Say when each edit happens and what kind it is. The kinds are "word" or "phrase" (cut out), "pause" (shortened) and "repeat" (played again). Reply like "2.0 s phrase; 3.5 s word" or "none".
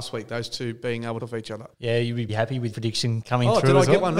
1.2 s phrase; 1.7 s pause; 2.3 s word; 2.7 s word; 3.2 s word